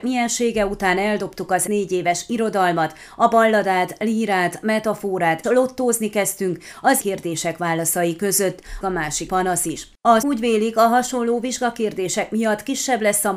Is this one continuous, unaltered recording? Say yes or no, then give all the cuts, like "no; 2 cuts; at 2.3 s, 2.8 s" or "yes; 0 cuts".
no; 6 cuts; at 1.7 s, 5.4 s, 7.0 s, 8.8 s, 9.3 s, 10.2 s